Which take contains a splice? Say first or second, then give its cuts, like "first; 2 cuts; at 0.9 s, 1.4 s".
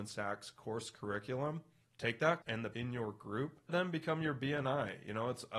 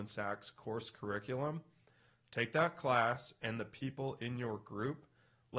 first; 4 cuts; at 1.8 s, 2.4 s, 2.7 s, 3.7 s